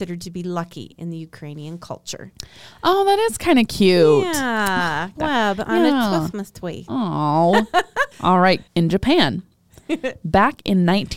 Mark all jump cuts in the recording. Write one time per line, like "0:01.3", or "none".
0:05.2
0:08.1
0:08.7